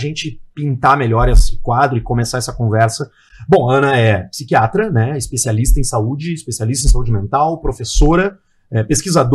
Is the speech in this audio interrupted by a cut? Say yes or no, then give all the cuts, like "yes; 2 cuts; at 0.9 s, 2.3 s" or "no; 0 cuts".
no; 0 cuts